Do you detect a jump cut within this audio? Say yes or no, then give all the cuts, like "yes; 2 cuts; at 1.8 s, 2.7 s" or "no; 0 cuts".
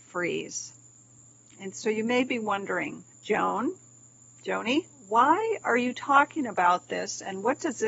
yes; 2 cuts; at 3.1 s, 4.9 s